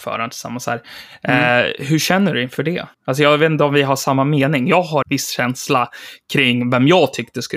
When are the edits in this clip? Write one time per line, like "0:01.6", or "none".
0:02.9
0:05.0